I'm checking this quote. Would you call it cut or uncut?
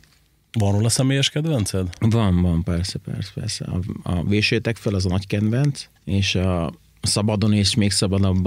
cut